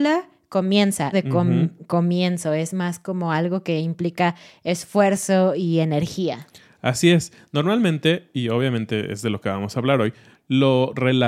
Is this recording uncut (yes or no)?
no